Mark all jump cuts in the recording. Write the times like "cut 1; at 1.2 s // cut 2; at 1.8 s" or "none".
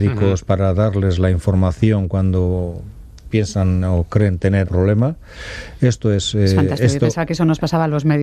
cut 1; at 4.6 s